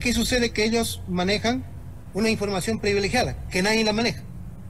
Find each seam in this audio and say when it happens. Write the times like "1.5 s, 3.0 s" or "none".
none